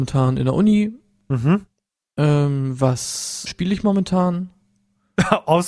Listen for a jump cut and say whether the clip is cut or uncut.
cut